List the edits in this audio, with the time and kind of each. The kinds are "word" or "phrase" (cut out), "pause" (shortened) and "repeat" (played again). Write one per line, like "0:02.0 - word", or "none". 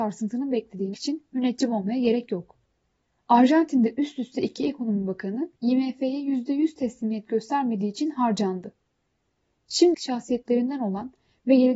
0:00.9 - word
0:05.6 - pause
0:09.9 - phrase